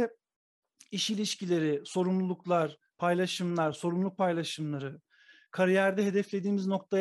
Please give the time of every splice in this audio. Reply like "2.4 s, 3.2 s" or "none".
none